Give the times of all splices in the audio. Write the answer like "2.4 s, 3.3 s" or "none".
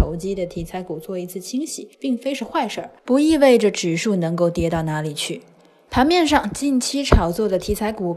1.9 s, 3.0 s